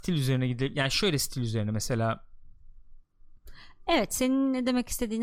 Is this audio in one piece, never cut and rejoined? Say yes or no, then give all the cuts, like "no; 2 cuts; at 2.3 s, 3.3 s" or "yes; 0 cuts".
yes; 0 cuts